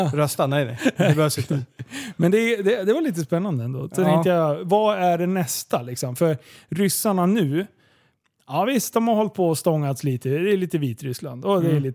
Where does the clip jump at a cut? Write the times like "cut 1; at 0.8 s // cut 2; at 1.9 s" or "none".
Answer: none